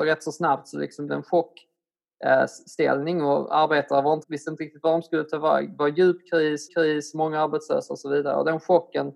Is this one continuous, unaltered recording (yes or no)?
no